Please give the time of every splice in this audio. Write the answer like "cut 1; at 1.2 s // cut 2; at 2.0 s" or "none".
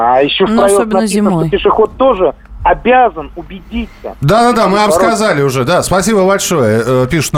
cut 1; at 4.9 s